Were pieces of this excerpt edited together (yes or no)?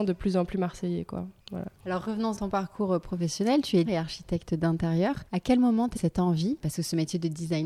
yes